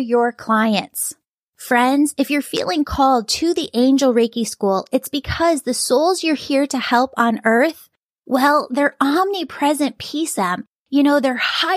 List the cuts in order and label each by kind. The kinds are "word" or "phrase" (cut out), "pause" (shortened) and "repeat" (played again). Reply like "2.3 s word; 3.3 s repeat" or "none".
10.4 s word